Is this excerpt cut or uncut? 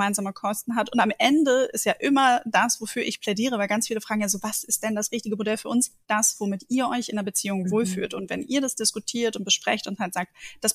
cut